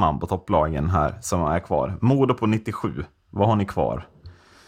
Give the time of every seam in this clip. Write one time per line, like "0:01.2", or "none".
none